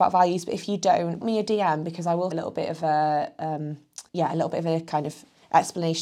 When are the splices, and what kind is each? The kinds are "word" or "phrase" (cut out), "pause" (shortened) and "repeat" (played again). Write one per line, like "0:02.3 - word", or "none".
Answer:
0:01.2 - word
0:02.3 - phrase
0:04.1 - pause

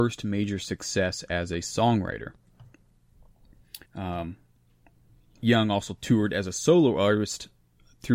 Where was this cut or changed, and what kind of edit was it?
0:03.9 - pause

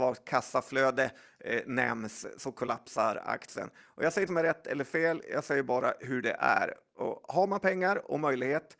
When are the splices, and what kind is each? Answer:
0:04.3 - phrase

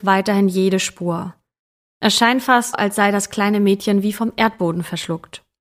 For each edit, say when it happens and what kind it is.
0:02.7 - word

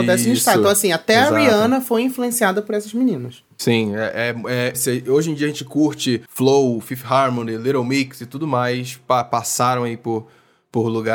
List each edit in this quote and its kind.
0:04.7 - word
0:06.3 - pause

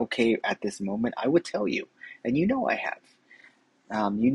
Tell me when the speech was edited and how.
none

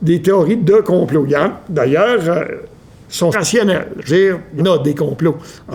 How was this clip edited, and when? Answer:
0:03.3 - word
0:04.1 - word
0:04.6 - word

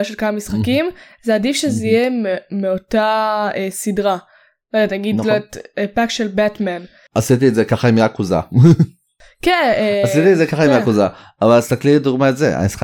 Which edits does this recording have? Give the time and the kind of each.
none

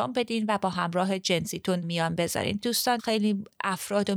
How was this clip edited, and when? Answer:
0:01.8 - word
0:02.6 - word
0:03.0 - word

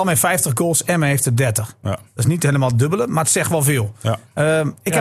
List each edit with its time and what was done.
none

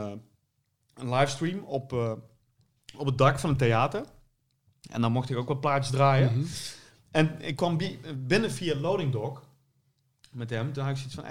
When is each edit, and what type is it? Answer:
none

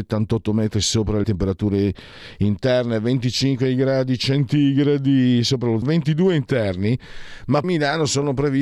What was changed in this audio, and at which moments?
0:01.2 - phrase
0:05.8 - word
0:07.6 - word

